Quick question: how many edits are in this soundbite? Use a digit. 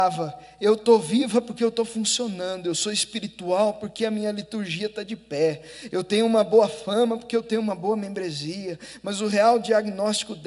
0